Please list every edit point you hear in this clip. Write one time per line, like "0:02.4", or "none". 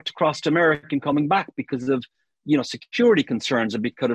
none

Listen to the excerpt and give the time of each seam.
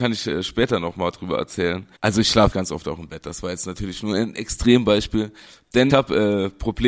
0:02.0
0:02.5
0:05.9

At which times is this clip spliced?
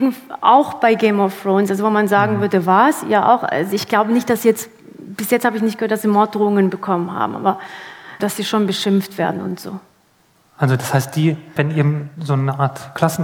0:08.2
0:11.6

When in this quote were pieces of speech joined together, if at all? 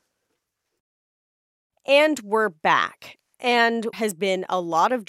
0:03.9

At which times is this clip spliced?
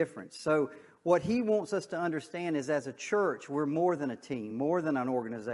none

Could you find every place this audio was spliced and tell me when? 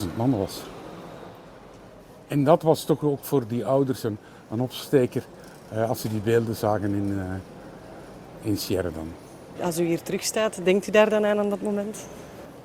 none

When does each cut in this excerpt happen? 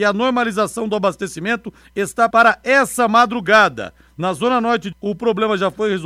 0:02.3
0:04.9

